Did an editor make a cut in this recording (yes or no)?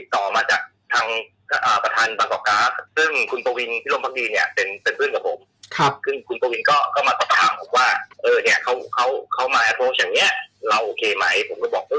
yes